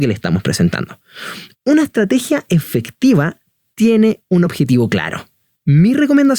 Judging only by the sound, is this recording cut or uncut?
uncut